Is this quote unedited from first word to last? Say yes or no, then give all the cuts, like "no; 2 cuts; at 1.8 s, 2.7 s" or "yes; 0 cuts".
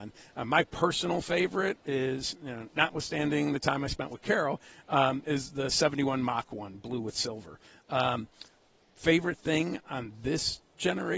yes; 0 cuts